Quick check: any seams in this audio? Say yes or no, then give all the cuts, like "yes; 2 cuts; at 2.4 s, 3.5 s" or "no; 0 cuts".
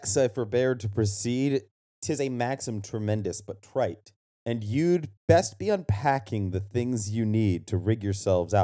yes; 2 cuts; at 4.3 s, 5.2 s